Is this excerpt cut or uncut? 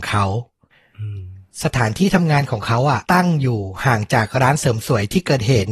cut